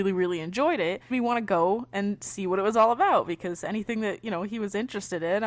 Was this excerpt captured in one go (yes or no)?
no